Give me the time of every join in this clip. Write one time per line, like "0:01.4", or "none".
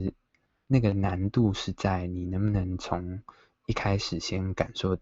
none